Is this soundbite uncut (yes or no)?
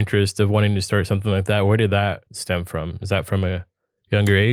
no